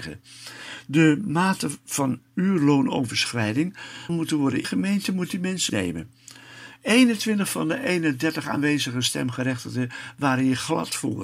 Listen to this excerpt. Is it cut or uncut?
cut